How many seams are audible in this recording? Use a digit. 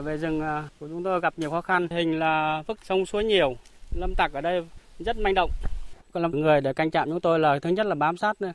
4